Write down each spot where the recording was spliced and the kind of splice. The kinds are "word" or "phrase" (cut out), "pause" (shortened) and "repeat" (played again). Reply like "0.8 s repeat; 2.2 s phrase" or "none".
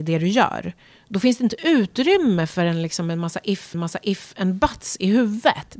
3.7 s repeat